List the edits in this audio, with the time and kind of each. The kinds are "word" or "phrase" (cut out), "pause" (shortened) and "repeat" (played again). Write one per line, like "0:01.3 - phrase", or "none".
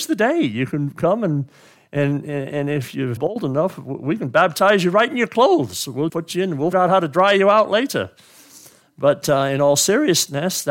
0:03.2 - word
0:06.1 - word
0:06.7 - word